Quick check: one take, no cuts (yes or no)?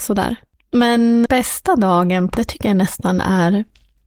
no